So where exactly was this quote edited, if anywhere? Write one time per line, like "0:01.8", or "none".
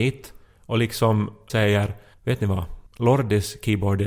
0:01.5
0:02.1
0:02.9